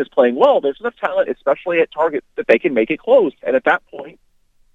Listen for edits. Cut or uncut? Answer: cut